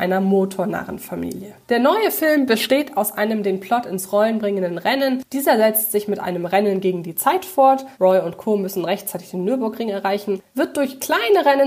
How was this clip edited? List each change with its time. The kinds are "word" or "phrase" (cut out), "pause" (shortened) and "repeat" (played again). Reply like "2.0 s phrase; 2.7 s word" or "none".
1.6 s pause; 7.9 s pause; 10.5 s pause